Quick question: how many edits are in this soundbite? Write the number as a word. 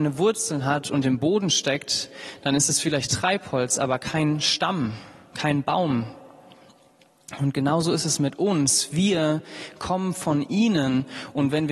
zero